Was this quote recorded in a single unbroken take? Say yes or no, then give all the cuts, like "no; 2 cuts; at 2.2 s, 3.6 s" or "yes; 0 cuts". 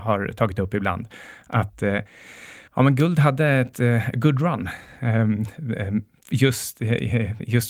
yes; 0 cuts